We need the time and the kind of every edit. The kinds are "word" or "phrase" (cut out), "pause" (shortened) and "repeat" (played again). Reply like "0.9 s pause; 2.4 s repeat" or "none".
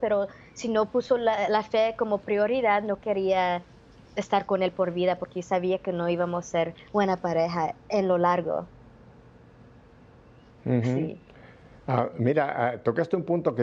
none

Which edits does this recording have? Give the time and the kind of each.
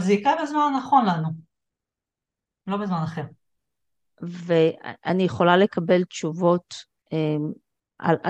none

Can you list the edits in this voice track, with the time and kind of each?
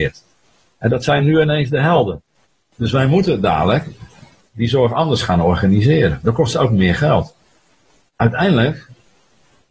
none

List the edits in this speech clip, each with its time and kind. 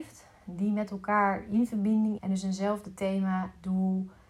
2.2 s word

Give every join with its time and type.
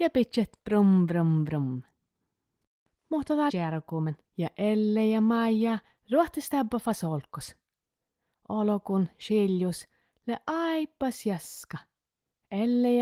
3.5 s phrase; 4.3 s pause

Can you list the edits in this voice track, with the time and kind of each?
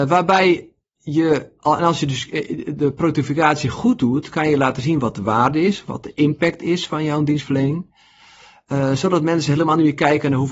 none

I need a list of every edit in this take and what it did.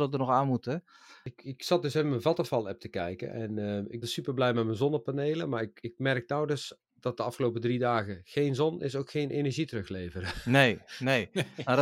4.0 s word

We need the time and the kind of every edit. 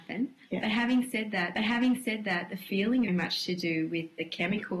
1.5 s repeat; 3.1 s phrase

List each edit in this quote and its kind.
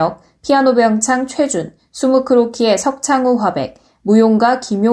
none

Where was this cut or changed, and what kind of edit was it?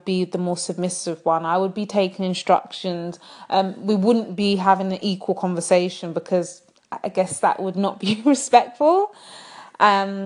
none

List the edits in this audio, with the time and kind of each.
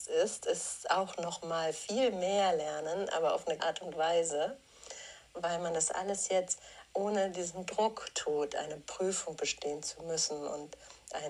3.6 s phrase

